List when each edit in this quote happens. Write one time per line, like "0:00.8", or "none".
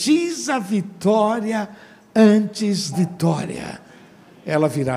0:02.9